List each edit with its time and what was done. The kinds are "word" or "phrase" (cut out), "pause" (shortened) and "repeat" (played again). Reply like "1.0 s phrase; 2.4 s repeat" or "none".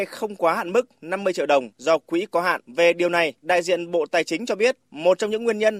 1.7 s pause; 2.6 s pause; 3.4 s pause; 4.8 s pause